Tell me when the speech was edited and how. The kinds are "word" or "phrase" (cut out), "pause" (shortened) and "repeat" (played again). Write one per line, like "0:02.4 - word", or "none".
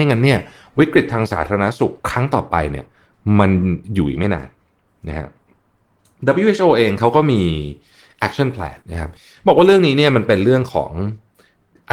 0:02.0 - pause
0:03.8 - pause
0:08.8 - pause